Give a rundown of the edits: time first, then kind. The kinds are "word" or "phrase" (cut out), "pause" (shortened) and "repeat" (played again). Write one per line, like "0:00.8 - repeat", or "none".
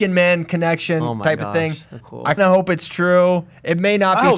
0:02.0 - word
0:02.4 - word